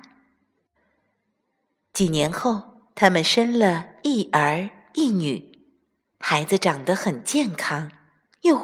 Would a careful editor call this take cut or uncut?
uncut